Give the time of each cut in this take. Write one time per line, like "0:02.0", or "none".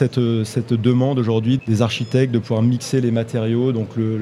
0:01.6